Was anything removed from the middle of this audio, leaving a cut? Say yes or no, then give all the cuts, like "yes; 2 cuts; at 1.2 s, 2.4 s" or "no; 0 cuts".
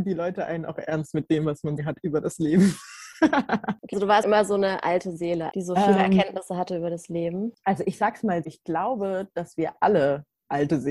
yes; 5 cuts; at 1.8 s, 3.9 s, 4.2 s, 5.5 s, 8.4 s